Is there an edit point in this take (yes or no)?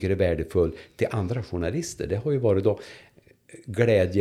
no